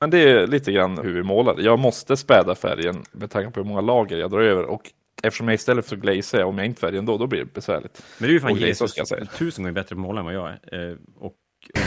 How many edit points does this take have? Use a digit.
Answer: 4